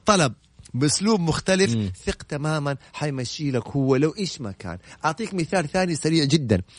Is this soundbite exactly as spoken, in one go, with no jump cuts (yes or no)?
yes